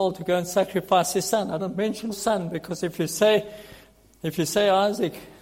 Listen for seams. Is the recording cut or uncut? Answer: cut